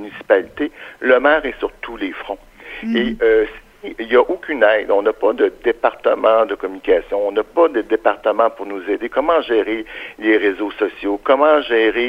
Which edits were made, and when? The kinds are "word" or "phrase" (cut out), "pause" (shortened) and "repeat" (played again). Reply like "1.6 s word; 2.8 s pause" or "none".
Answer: none